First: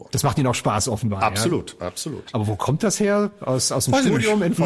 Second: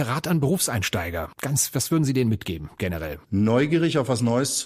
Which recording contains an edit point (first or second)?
second